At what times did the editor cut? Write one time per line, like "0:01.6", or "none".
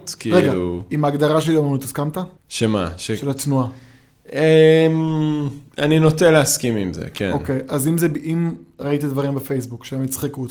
0:02.4
0:05.7